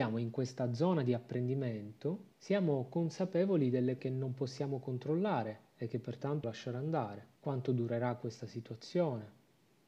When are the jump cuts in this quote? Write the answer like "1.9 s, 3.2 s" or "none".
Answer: 2.3 s, 4.0 s, 6.4 s, 7.4 s